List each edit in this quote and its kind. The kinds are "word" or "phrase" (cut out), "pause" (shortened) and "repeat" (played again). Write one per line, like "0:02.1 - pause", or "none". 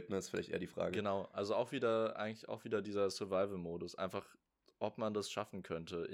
none